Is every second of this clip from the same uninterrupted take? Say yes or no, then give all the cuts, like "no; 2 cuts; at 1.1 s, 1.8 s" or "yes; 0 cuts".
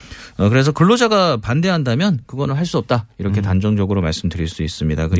yes; 0 cuts